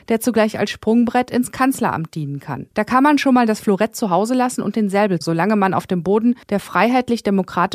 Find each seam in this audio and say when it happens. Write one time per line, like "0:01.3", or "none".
0:02.7
0:05.2
0:06.4